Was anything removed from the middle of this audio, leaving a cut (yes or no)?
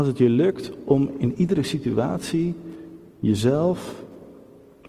no